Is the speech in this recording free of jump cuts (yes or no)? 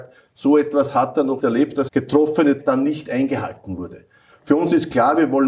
no